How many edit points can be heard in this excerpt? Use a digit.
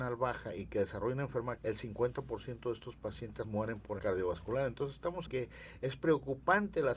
4